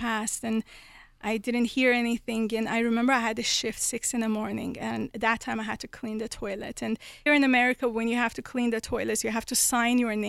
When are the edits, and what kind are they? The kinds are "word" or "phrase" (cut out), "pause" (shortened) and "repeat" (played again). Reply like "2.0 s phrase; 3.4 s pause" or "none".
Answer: 7.3 s word